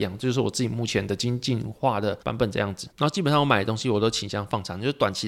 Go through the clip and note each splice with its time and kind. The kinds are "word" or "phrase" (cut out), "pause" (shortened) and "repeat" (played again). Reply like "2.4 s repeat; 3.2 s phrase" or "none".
2.2 s pause; 2.9 s pause